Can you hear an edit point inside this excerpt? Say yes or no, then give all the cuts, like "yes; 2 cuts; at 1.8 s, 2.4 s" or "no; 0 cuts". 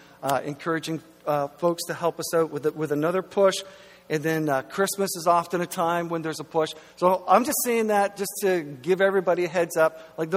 no; 0 cuts